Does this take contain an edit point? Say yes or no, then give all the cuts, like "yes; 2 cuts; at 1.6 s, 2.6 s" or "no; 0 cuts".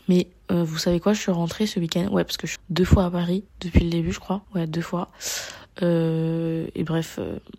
yes; 3 cuts; at 2.6 s, 3.5 s, 4.4 s